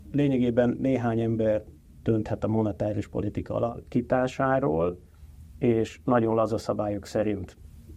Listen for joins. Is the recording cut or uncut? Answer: uncut